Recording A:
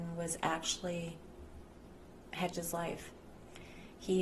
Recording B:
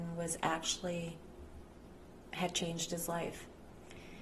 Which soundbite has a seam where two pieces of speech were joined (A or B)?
A